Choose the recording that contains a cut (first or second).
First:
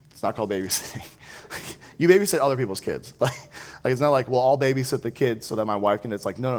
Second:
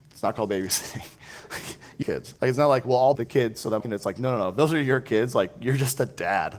second